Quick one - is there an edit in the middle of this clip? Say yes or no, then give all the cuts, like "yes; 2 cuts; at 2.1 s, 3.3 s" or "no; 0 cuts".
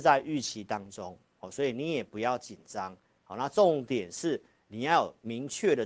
no; 0 cuts